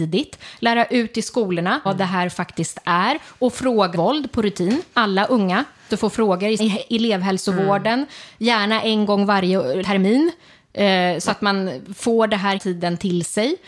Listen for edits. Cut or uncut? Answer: cut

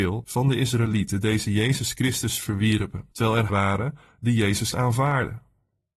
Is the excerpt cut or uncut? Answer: cut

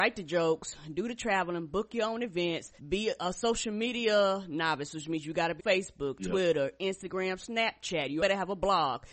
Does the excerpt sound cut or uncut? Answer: cut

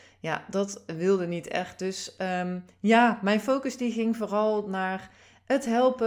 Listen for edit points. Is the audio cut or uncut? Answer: uncut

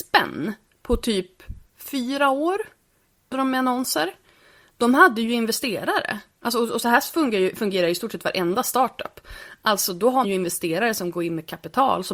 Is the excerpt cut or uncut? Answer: cut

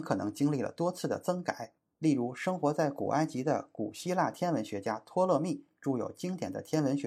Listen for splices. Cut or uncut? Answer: uncut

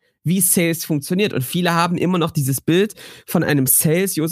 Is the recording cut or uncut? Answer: uncut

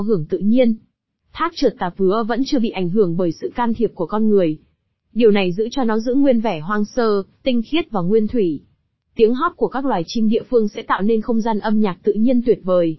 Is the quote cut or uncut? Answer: uncut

